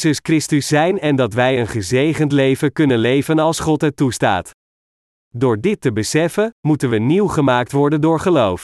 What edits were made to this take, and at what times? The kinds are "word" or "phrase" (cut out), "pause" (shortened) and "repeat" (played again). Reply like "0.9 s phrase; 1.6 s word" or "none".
none